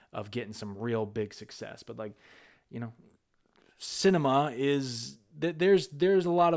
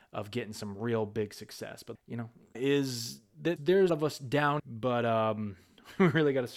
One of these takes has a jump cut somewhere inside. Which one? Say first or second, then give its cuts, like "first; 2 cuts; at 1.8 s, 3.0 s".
second; 5 cuts; at 1.9 s, 2.5 s, 3.6 s, 3.9 s, 4.6 s